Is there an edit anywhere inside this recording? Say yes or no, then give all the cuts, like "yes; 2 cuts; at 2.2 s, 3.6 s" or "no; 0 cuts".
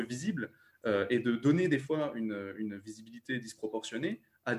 no; 0 cuts